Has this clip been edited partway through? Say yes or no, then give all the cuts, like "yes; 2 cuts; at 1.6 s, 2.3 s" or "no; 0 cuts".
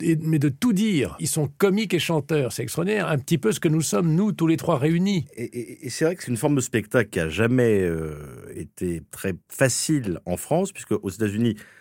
yes; 1 cut; at 9.4 s